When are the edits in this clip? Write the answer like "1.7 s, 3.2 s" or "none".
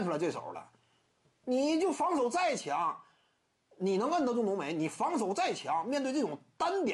none